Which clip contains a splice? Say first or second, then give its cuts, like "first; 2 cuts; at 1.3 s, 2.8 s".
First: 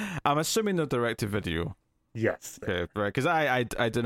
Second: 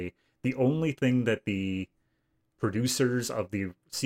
first; 1 cut; at 2.6 s